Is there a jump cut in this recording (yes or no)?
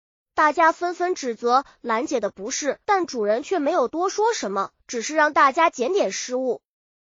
yes